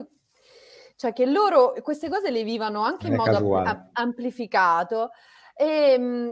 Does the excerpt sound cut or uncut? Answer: uncut